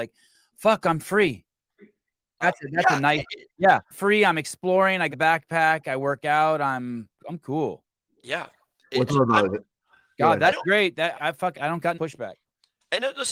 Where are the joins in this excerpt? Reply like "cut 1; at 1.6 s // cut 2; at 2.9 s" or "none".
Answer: cut 1; at 2.4 s // cut 2; at 3.9 s // cut 3; at 5.1 s // cut 4; at 7.2 s // cut 5; at 9.1 s // cut 6; at 10.6 s // cut 7; at 11.1 s // cut 8; at 11.5 s // cut 9; at 11.9 s